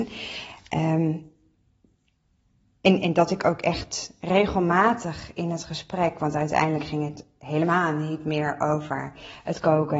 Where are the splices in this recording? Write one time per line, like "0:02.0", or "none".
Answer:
none

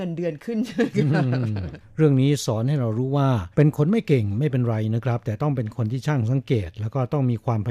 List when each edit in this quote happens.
0:03.5

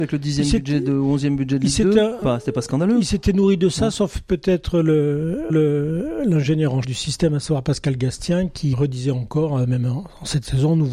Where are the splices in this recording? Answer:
0:02.2
0:05.5
0:06.8
0:08.7

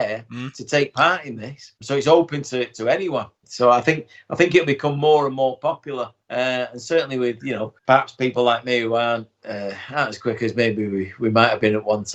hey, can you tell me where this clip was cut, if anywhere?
0:01.8
0:03.3
0:06.2
0:07.8

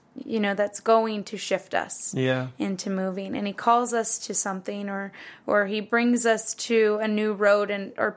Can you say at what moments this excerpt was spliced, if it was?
none

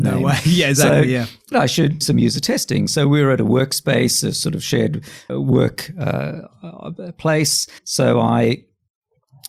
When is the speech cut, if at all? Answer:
0:01.5
0:02.0
0:05.3
0:07.8

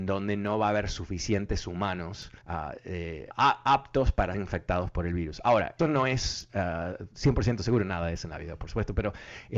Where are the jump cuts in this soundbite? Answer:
0:02.4
0:03.3
0:04.3
0:05.8

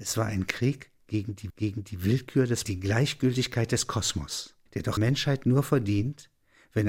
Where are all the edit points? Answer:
0:01.5
0:02.7
0:04.7
0:05.0

